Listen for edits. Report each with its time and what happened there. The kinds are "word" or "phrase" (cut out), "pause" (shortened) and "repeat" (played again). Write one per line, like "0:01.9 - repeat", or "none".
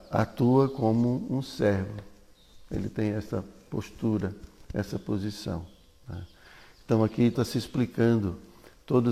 0:07.3 - word

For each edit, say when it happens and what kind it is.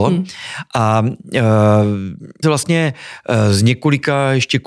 0:02.4 - phrase

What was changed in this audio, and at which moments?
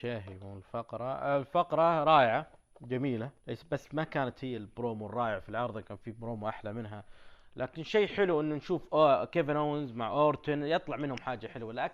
0:03.4 - pause

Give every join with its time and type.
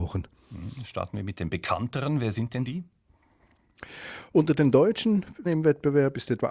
0:05.5 - word

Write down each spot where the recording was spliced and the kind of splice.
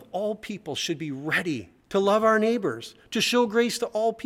0:01.8 - pause

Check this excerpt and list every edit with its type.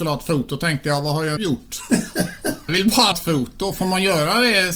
0:01.4 - word
0:02.7 - word
0:03.1 - word

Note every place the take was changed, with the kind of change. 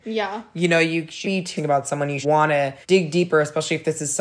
0:01.2 - word
0:01.6 - word
0:02.2 - word
0:02.8 - pause

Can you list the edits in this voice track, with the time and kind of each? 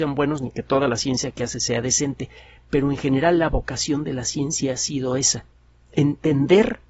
none

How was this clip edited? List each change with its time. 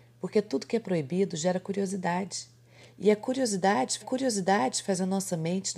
0:04.0 - repeat

